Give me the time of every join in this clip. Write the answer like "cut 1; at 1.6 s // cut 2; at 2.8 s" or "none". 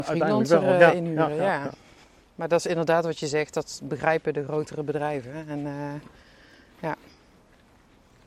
none